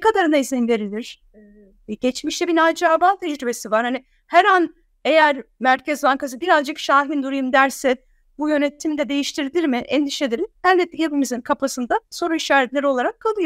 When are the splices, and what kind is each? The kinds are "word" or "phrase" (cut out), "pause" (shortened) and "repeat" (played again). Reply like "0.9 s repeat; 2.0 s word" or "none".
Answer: none